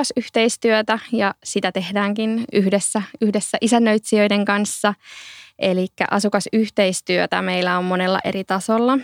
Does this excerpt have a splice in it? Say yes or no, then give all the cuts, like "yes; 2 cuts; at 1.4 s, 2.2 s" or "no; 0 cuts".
no; 0 cuts